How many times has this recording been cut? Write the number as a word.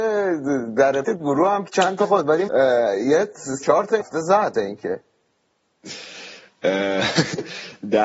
six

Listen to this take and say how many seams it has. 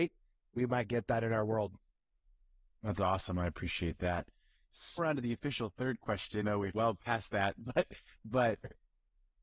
three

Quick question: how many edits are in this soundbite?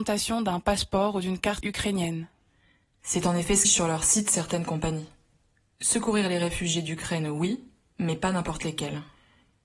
two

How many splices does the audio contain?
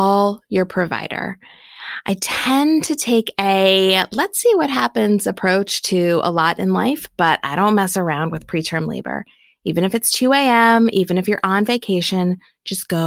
zero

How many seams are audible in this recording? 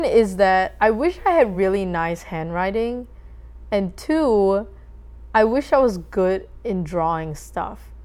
zero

